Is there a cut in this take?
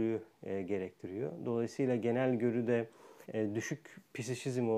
yes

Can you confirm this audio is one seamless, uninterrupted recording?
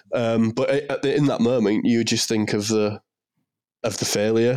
yes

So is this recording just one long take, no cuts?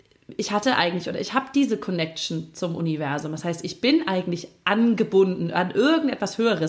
yes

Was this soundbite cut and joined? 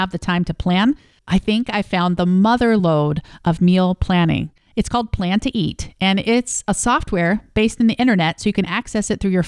no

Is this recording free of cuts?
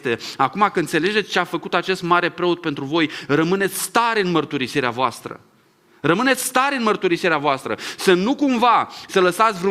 yes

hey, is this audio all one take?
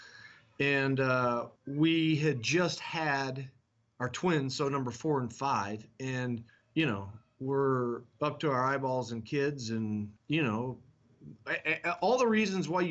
no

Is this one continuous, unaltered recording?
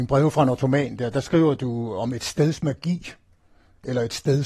yes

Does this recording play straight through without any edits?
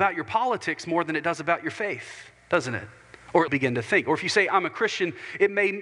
no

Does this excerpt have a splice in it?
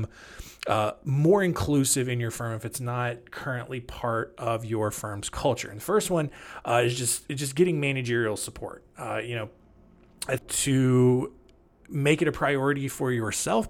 yes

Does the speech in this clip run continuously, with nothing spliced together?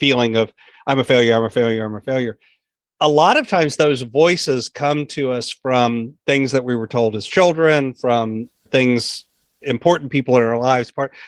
yes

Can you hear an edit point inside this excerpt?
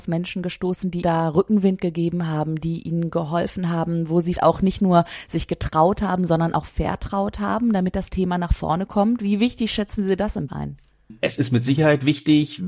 yes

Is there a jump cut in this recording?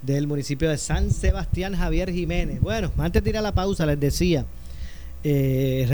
no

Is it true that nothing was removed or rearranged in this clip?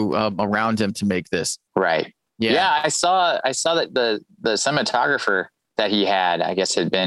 no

